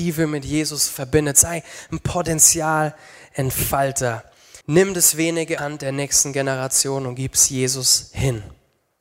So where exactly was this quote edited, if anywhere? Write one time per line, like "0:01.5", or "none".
0:04.6
0:05.6